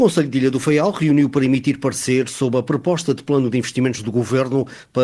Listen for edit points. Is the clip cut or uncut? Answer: uncut